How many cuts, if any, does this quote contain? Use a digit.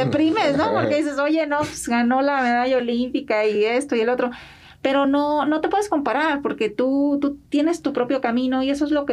0